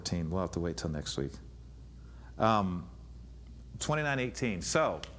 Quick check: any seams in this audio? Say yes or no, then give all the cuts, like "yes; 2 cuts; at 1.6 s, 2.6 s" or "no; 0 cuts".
yes; 1 cut; at 3.8 s